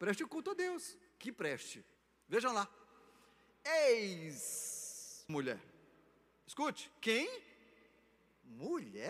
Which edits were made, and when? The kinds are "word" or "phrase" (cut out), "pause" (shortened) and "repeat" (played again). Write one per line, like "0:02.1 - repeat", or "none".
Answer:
0:02.0 - pause
0:05.3 - word